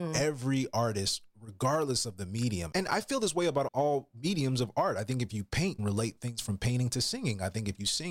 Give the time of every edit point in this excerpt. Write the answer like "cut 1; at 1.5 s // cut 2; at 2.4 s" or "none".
cut 1; at 2.7 s // cut 2; at 3.7 s // cut 3; at 5.8 s